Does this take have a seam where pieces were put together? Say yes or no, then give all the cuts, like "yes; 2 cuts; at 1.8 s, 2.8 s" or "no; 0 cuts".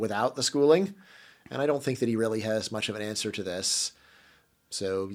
no; 0 cuts